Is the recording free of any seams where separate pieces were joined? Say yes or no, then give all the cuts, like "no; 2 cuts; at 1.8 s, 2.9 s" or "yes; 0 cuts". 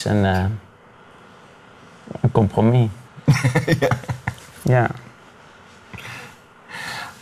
no; 1 cut; at 3.1 s